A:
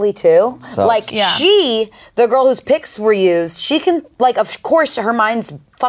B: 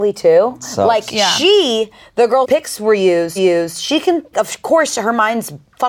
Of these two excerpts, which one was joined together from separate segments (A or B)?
B